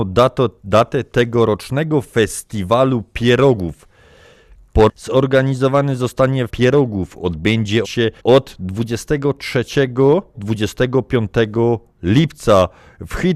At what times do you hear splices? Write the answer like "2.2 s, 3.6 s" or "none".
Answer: 4.9 s, 6.5 s, 7.8 s, 8.2 s, 10.3 s